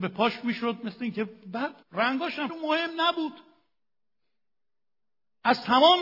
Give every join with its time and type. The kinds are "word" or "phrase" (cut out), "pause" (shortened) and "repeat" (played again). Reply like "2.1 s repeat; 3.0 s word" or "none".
1.8 s pause; 2.5 s phrase